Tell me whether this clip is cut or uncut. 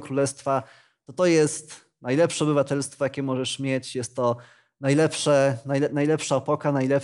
uncut